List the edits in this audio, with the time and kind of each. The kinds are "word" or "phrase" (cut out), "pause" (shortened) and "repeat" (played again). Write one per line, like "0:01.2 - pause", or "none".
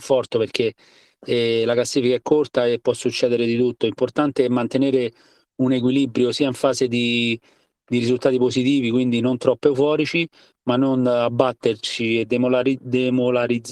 none